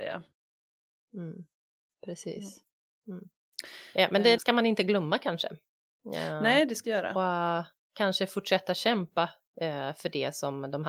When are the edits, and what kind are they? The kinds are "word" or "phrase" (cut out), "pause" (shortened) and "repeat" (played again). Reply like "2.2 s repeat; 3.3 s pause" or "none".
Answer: 4.4 s word; 6.8 s phrase